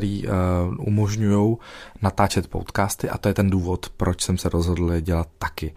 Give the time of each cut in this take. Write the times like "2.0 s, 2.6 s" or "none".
none